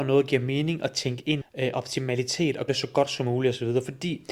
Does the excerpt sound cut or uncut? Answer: cut